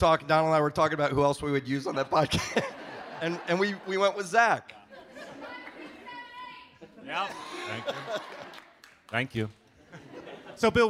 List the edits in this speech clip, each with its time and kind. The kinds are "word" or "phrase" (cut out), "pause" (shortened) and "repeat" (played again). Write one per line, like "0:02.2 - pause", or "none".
none

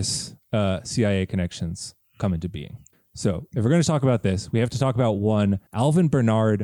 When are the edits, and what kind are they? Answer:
0:02.9 - pause
0:05.7 - pause

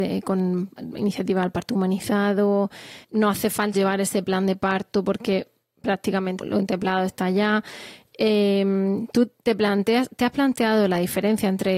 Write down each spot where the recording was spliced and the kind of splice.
0:03.0 - word
0:03.7 - word
0:06.4 - word

